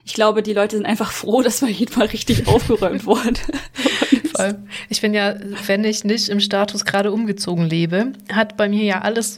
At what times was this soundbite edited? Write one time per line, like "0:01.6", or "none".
0:05.6